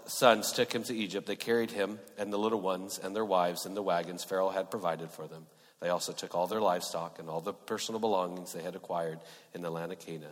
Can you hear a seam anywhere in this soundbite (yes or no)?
no